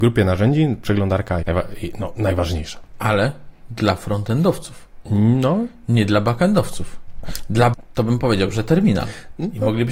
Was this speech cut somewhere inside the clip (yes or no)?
yes